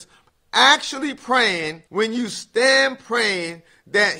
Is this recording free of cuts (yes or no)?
no